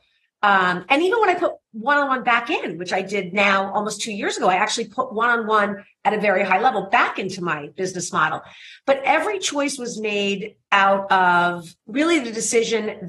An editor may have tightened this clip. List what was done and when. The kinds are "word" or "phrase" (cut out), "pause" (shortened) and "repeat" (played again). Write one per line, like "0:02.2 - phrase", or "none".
0:10.6 - pause
0:11.8 - pause